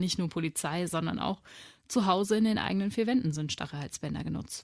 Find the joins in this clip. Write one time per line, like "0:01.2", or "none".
none